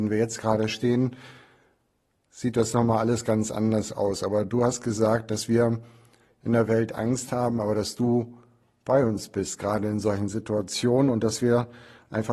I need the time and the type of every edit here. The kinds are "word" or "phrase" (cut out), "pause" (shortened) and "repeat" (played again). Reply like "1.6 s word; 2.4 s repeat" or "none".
none